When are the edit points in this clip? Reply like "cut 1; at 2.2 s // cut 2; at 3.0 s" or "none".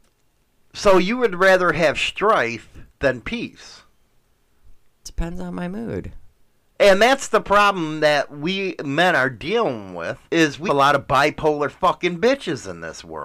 cut 1; at 2.9 s // cut 2; at 6.5 s // cut 3; at 10.3 s // cut 4; at 10.7 s